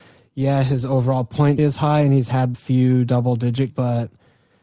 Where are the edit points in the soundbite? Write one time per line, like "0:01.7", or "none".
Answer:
0:01.6
0:02.5
0:03.7